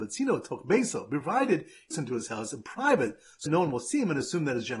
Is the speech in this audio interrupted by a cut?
yes; 2 cuts; at 1.9 s, 3.5 s

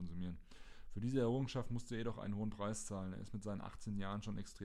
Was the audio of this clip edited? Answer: no; 0 cuts

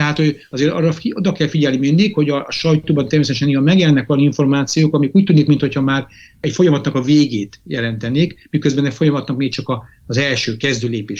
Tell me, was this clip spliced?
no; 0 cuts

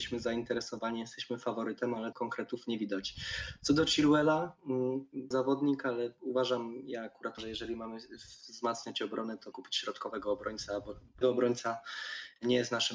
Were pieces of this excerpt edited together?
yes; 5 cuts; at 2.1 s, 5.3 s, 7.4 s, 9.5 s, 11.2 s

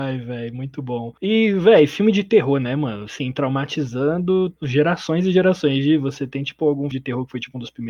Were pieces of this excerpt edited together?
yes; 3 cuts; at 1.2 s, 4.6 s, 6.9 s

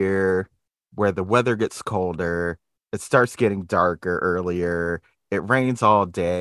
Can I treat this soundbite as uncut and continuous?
yes; 0 cuts

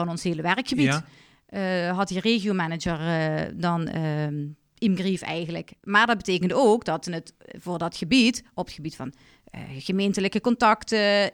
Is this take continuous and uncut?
yes; 0 cuts

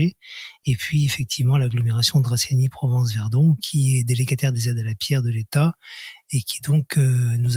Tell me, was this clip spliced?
no; 0 cuts

